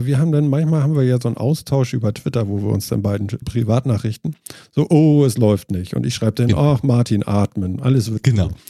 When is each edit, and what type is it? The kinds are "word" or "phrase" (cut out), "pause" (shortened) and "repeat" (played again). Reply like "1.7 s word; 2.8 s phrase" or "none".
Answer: 3.4 s phrase

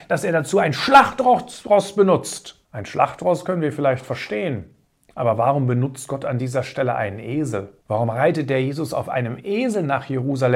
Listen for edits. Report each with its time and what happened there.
2.6 s pause; 4.8 s pause; 7.8 s pause

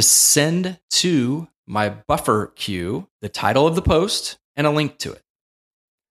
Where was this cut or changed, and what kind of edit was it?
3.1 s pause; 4.4 s pause

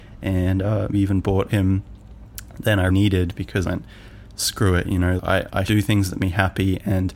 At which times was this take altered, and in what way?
0.9 s word; 1.5 s phrase; 2.9 s word; 3.6 s phrase; 5.2 s word; 5.7 s word; 6.2 s word

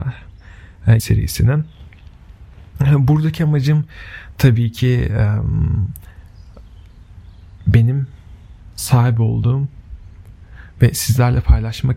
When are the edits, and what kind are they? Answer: 1.0 s phrase

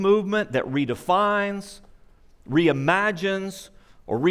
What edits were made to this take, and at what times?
none

